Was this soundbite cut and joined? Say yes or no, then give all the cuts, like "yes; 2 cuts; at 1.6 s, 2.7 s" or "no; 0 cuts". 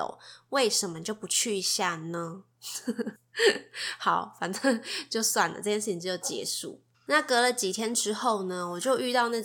yes; 2 cuts; at 3.2 s, 6.9 s